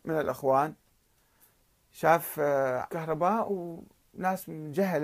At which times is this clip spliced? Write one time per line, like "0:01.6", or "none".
0:02.9